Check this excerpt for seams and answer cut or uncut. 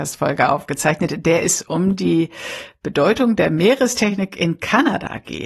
uncut